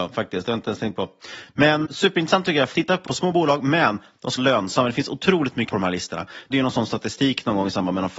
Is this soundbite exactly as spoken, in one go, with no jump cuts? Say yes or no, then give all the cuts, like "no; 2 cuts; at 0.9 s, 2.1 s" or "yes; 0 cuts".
no; 6 cuts; at 1.8 s, 2.7 s, 3.1 s, 4.4 s, 5.7 s, 6.5 s